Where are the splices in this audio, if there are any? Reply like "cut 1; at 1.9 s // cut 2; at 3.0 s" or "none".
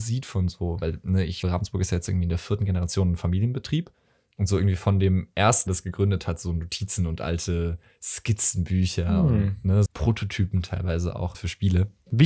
cut 1; at 1.4 s // cut 2; at 5.7 s // cut 3; at 9.9 s // cut 4; at 11.3 s